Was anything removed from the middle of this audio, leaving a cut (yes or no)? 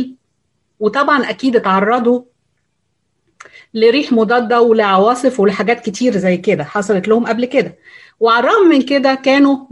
no